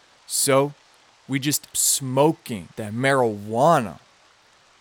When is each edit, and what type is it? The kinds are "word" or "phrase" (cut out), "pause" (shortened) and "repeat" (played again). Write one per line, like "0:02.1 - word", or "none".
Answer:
0:01.7 - phrase
0:02.7 - pause

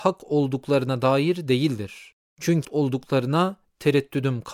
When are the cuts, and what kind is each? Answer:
0:02.6 - word

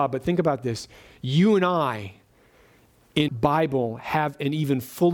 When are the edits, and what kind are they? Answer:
0:03.3 - word

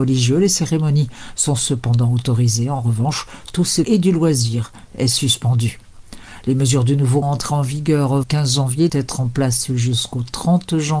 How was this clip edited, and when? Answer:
0:03.8 - phrase
0:07.2 - word
0:08.2 - word
0:08.9 - word

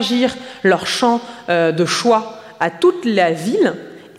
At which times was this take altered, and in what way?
none

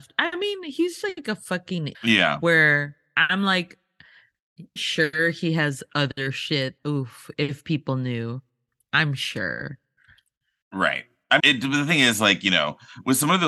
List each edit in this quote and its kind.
0:01.0 - word
0:01.9 - word
0:04.8 - word
0:06.8 - word
0:07.3 - word
0:11.4 - word

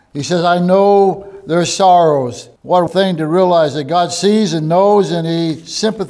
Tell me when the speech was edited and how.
0:02.6 - pause
0:02.9 - word

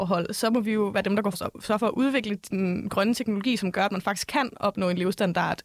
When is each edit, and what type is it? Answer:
0:01.3 - word

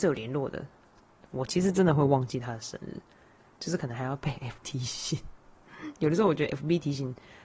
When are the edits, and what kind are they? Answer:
0:04.6 - word

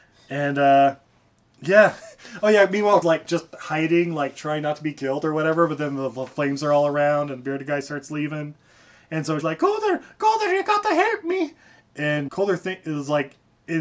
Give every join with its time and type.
0:03.0 - word
0:09.4 - word
0:12.3 - word

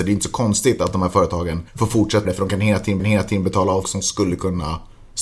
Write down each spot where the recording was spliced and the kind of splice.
0:01.7 - pause
0:02.2 - word
0:03.0 - repeat
0:03.8 - word

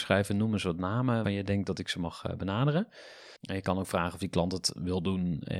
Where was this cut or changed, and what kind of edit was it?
0:01.2 - word
0:03.4 - pause

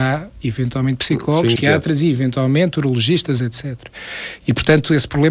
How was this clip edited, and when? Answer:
0:01.6 - word
0:03.4 - word

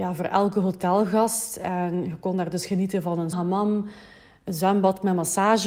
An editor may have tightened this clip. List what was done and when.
0:03.3 - word

